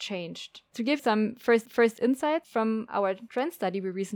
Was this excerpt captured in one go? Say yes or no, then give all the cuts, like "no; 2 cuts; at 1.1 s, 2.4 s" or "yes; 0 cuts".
no; 2 cuts; at 1.0 s, 1.7 s